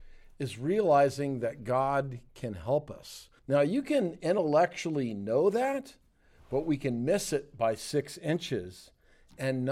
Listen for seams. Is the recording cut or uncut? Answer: cut